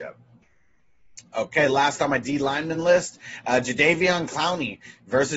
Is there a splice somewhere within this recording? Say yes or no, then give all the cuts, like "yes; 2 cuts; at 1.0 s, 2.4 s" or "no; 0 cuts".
no; 0 cuts